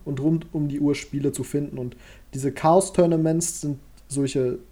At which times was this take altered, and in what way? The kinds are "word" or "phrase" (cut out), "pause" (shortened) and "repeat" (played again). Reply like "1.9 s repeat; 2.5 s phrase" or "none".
none